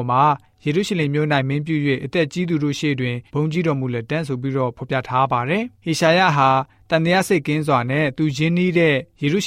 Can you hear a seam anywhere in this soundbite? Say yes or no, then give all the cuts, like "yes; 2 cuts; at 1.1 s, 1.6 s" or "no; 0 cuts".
yes; 2 cuts; at 3.3 s, 5.7 s